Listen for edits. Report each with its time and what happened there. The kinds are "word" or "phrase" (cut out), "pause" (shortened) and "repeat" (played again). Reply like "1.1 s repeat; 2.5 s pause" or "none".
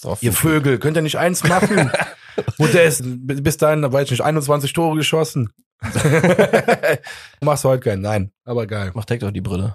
3.0 s word; 7.4 s word